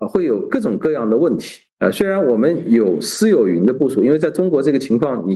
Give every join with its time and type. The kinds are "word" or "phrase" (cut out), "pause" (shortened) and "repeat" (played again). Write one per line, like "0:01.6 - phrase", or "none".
0:01.7 - pause